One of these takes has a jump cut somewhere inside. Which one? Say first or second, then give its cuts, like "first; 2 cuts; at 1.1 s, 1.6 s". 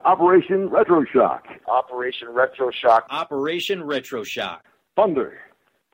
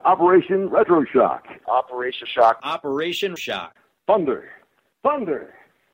second; 2 cuts; at 2.2 s, 3.4 s